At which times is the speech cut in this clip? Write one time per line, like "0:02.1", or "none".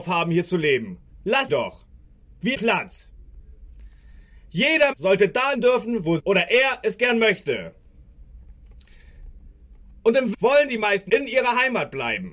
0:01.5
0:02.5
0:04.9
0:05.5
0:06.2
0:10.3
0:11.1